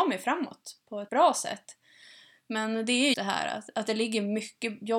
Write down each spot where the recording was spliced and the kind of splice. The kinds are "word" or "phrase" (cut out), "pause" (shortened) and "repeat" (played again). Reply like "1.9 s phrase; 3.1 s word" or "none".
1.1 s word; 3.1 s word